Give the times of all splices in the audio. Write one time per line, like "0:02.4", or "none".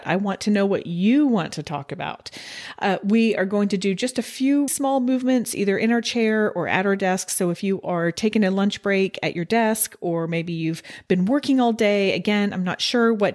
0:04.7